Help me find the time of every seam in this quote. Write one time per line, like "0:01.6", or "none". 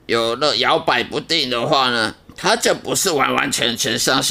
0:02.2